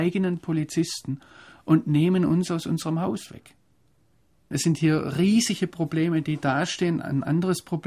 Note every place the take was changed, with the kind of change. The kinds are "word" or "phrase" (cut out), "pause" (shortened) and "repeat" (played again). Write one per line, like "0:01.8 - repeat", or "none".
none